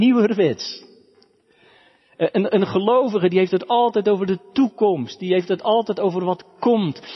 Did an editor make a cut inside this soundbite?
no; 0 cuts

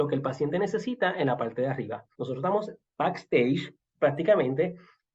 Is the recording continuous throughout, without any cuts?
no; 1 cut; at 2.1 s

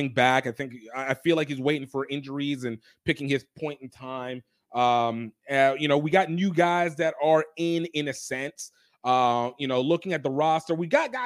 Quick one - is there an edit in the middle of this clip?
no; 0 cuts

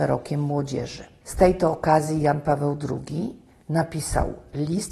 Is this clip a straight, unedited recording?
no; 1 cut; at 1.2 s

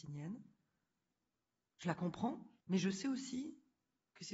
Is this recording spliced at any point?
yes; 1 cut; at 2.6 s

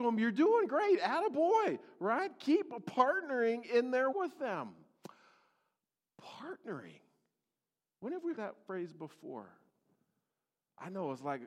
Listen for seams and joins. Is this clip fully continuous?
no; 2 cuts; at 4.1 s, 8.4 s

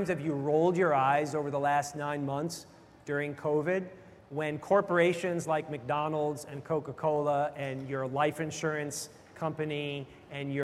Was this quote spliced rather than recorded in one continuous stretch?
no; 0 cuts

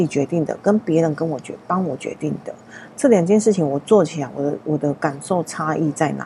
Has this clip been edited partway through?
no; 0 cuts

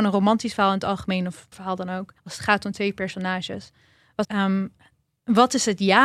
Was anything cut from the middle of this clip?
yes; 3 cuts; at 1.5 s, 2.2 s, 4.2 s

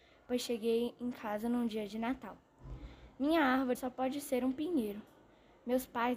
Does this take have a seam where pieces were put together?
yes; 1 cut; at 3.7 s

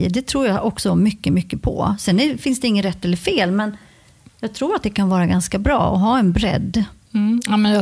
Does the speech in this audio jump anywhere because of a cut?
no; 0 cuts

